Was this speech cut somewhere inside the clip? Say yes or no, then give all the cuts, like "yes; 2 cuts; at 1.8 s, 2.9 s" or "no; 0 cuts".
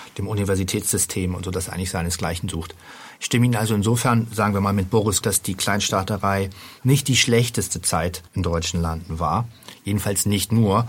yes; 2 cuts; at 5.2 s, 8.3 s